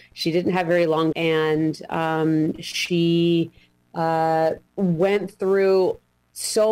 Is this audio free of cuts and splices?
no; 2 cuts; at 1.1 s, 4.7 s

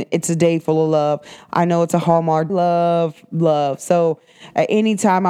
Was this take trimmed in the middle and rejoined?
yes; 1 cut; at 2.5 s

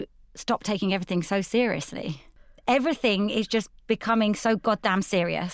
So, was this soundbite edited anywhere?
no; 0 cuts

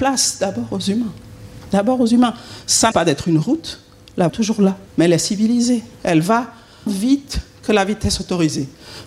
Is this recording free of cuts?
no; 5 cuts; at 2.9 s, 4.3 s, 4.9 s, 5.9 s, 6.9 s

